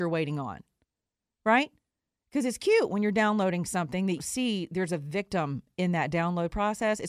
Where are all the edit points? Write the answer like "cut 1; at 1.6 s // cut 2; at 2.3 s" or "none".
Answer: cut 1; at 4.2 s